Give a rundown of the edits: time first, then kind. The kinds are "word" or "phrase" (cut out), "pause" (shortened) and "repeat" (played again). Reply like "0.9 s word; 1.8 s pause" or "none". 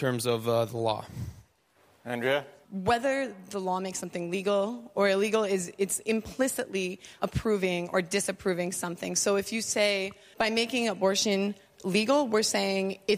1.8 s pause; 7.2 s word; 10.3 s word